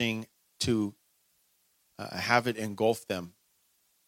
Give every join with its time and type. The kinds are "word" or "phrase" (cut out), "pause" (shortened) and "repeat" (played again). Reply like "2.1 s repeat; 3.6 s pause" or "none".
none